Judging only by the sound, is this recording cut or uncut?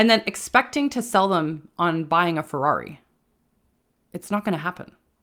uncut